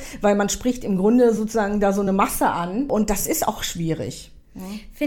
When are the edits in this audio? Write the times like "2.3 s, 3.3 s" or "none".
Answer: none

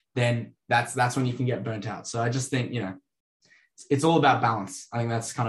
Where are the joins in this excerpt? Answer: none

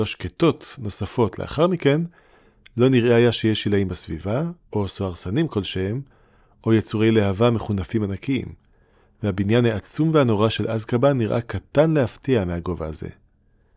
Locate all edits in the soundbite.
none

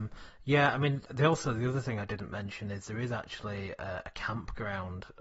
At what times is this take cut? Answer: 1.1 s

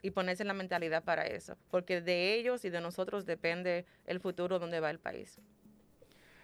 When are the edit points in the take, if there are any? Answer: 1.6 s

